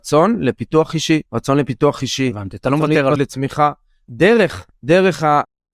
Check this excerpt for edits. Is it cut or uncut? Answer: cut